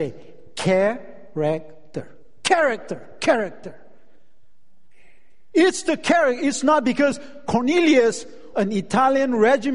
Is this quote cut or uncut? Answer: cut